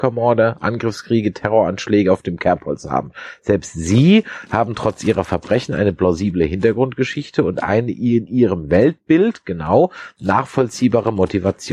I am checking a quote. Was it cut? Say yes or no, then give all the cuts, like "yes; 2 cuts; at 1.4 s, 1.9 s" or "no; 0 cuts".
no; 0 cuts